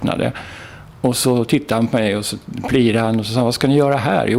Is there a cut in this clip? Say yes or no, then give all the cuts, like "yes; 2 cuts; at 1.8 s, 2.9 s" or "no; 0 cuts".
no; 0 cuts